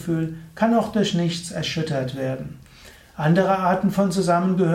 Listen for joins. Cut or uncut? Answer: uncut